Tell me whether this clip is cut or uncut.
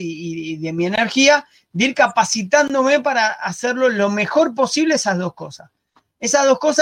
uncut